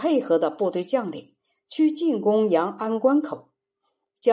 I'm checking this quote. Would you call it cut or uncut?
uncut